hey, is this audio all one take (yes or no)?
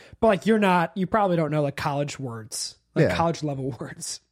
yes